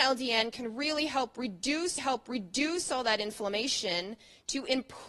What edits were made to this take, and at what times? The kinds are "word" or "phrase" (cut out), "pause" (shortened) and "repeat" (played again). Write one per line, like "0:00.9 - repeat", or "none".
0:02.0 - repeat